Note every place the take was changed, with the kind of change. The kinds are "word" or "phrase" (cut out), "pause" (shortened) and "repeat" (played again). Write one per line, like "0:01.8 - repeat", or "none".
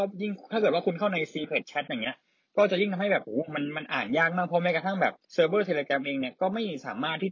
0:05.2 - pause